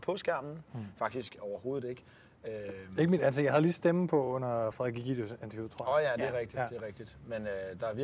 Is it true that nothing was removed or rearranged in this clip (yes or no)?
yes